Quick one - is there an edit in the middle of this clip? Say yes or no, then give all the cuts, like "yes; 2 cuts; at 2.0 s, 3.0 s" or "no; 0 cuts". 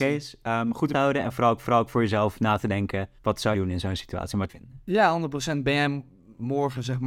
yes; 5 cuts; at 0.9 s, 1.6 s, 3.2 s, 3.5 s, 4.5 s